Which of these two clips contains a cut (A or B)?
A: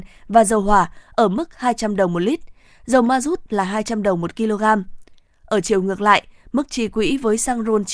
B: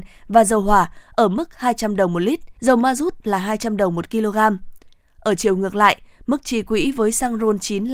B